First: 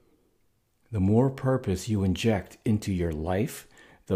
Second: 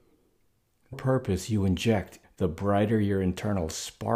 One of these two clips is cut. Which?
second; 2 cuts; at 0.9 s, 2.2 s

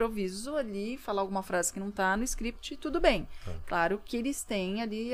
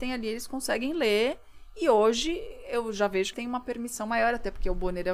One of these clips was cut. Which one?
second; 1 cut; at 3.3 s

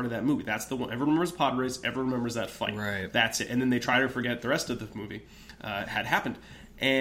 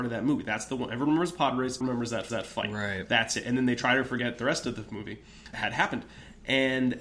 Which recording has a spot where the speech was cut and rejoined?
second; 3 cuts; at 1.8 s, 2.3 s, 5.5 s

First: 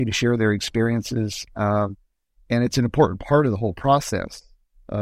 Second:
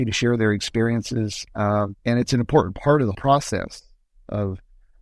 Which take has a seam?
second; 2 cuts; at 2.0 s, 3.1 s

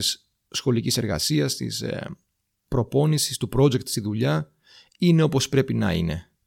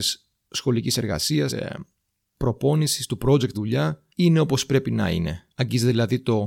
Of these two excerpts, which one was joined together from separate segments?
second; 4 cuts; at 1.5 s, 3.5 s, 4.1 s, 5.5 s

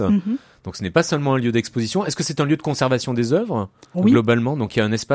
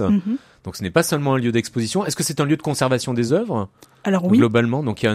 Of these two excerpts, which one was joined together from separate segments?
first; 1 cut; at 3.9 s

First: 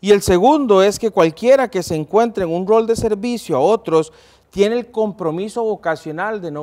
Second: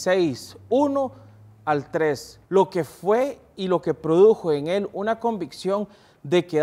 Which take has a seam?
second; 1 cut; at 2.5 s

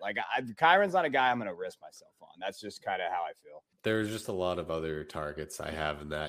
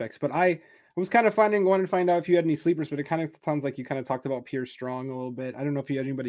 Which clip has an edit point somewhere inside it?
first; 1 cut; at 3.7 s

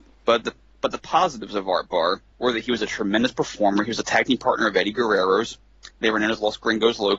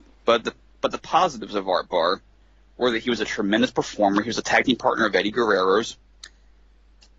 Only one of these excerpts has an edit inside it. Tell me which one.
first; 2 cuts; at 2.3 s, 5.9 s

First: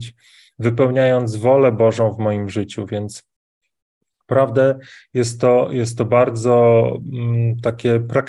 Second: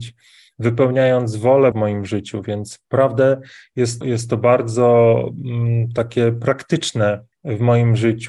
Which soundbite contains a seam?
second; 4 cuts; at 1.7 s, 2.8 s, 4.0 s, 7.3 s

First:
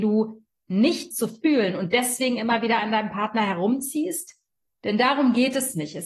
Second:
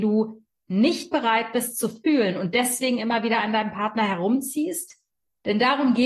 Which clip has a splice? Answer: first; 1 cut; at 1.1 s

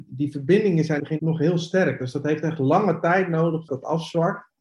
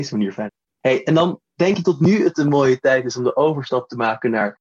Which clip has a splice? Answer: first; 2 cuts; at 1.0 s, 3.7 s

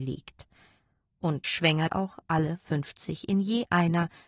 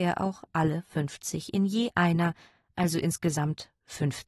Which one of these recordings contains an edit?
first; 2 cuts; at 1.4 s, 1.9 s

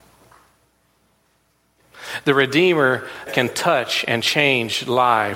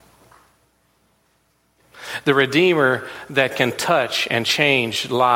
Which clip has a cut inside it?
first; 1 cut; at 3.3 s

